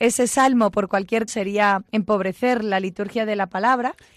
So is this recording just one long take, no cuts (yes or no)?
no